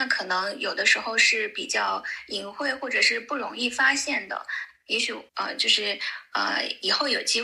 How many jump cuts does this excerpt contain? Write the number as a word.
one